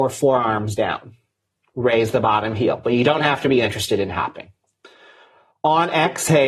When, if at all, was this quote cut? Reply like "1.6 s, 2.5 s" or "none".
none